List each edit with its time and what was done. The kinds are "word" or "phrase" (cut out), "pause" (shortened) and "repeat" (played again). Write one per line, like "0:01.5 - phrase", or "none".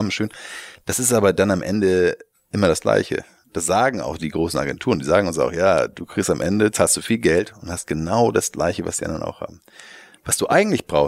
none